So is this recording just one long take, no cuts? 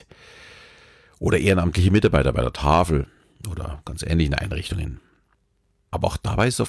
yes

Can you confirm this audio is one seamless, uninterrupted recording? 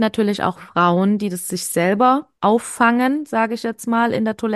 no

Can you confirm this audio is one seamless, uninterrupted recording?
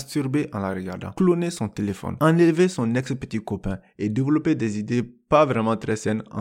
yes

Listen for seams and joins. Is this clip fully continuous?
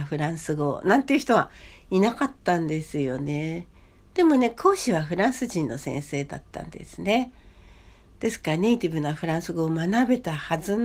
yes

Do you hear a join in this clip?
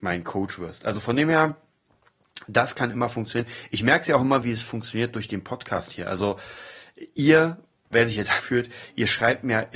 yes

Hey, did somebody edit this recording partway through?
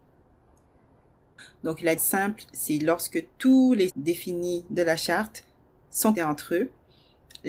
yes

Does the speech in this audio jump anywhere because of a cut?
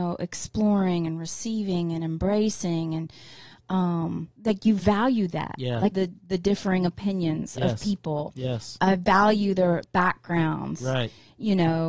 yes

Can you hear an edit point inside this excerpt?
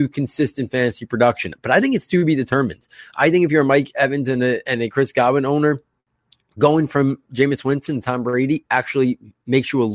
no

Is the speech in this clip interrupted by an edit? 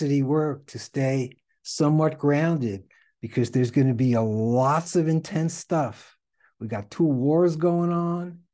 no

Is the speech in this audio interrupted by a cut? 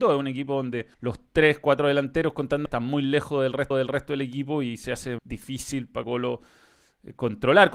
yes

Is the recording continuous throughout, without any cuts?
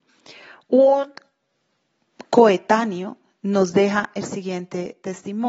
yes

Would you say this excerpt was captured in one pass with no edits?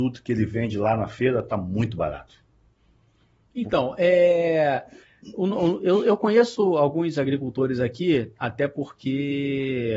yes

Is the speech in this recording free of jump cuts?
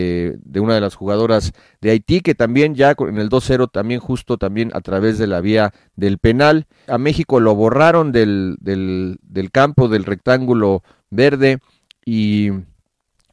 no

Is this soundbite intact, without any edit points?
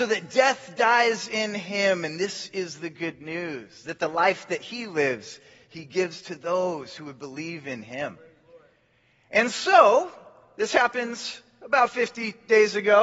yes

